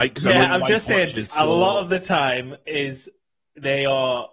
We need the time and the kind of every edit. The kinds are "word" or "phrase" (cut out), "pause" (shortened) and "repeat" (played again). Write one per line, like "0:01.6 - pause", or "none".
0:01.3 - word